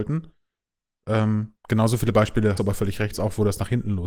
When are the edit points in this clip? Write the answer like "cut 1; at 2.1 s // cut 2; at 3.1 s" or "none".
cut 1; at 2.6 s // cut 2; at 3.1 s

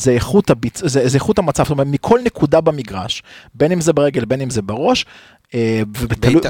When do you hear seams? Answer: none

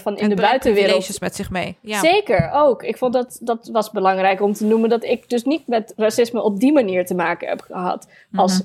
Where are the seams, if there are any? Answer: none

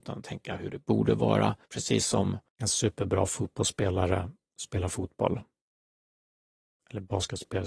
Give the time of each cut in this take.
cut 1; at 1.6 s // cut 2; at 2.5 s

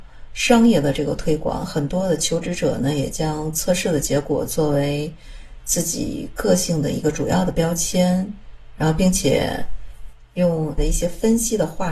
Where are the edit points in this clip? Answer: cut 1; at 10.8 s

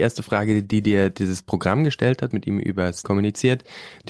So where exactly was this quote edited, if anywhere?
cut 1; at 2.3 s // cut 2; at 3.0 s

